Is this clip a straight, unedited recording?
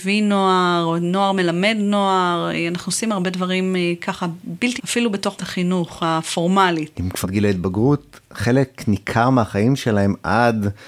no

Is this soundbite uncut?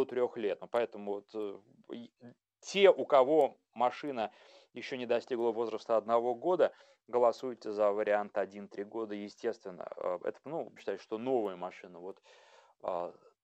no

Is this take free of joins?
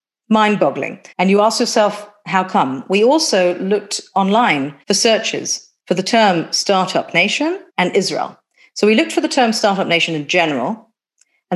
no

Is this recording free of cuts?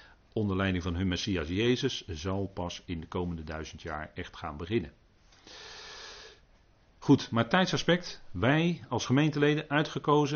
yes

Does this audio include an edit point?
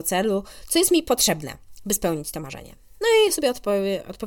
no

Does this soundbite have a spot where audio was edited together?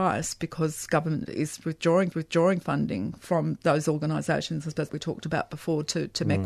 yes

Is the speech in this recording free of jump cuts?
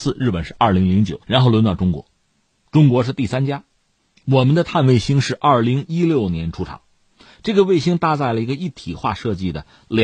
no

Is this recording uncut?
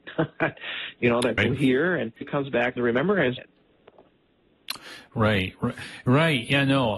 no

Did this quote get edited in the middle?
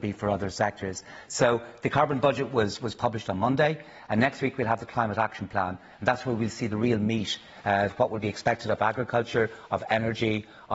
no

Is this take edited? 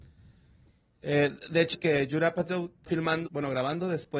yes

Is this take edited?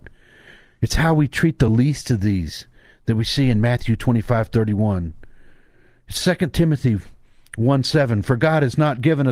no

